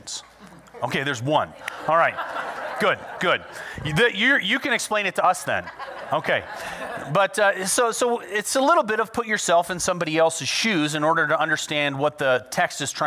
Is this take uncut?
yes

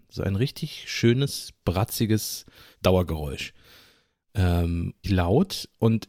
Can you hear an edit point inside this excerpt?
yes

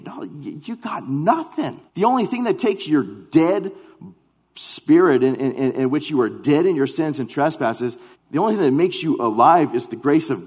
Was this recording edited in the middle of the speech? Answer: yes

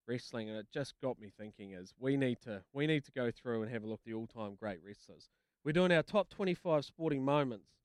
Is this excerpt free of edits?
no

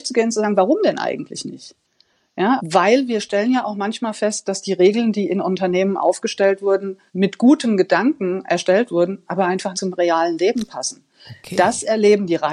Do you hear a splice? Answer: yes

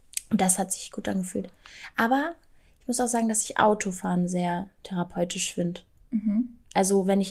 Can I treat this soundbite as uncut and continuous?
yes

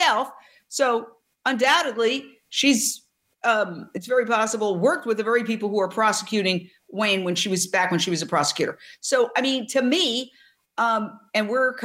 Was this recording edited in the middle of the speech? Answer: no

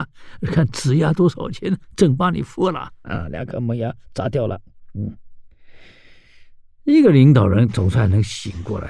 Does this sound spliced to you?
no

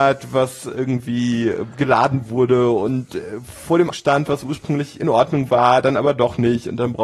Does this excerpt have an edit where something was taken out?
yes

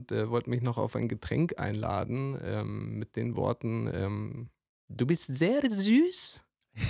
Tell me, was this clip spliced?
no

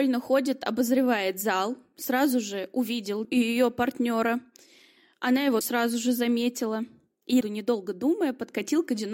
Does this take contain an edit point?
yes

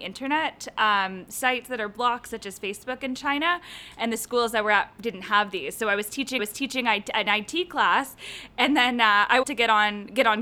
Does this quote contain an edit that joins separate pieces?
yes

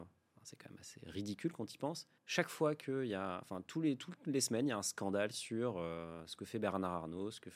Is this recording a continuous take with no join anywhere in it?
no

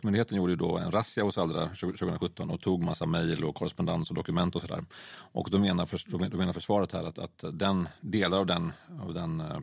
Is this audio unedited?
yes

